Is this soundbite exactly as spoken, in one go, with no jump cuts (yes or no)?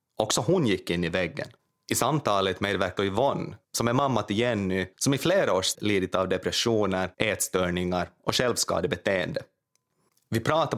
no